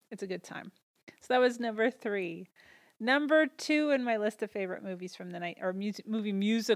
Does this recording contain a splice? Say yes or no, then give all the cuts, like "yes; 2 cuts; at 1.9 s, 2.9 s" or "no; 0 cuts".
no; 0 cuts